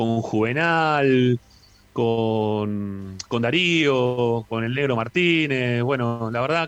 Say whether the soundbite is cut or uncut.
uncut